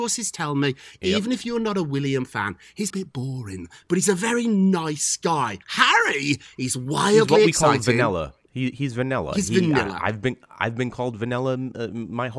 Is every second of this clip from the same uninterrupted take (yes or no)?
no